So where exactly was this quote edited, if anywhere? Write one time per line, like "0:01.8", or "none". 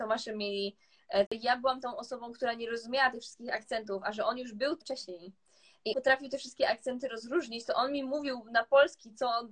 0:01.3
0:04.8
0:05.9